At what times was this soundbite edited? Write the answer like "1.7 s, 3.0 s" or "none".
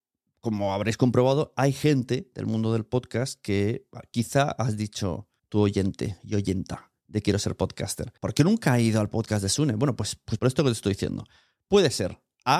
5.4 s, 8.2 s, 10.4 s